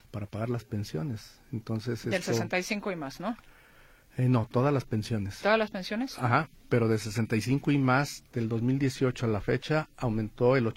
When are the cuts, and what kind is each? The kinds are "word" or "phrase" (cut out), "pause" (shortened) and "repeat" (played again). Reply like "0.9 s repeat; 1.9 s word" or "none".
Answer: none